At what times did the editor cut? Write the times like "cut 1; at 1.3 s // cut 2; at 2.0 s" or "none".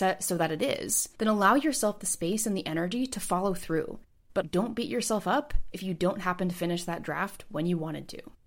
cut 1; at 4.4 s